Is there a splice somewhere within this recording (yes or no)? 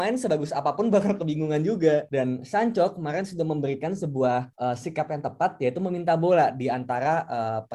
no